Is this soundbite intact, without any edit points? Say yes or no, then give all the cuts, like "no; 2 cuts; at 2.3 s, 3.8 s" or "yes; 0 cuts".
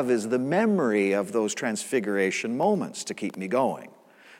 yes; 0 cuts